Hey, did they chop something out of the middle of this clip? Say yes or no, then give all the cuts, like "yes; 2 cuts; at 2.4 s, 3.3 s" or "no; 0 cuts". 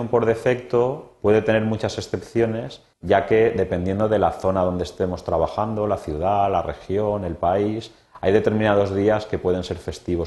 yes; 1 cut; at 2.9 s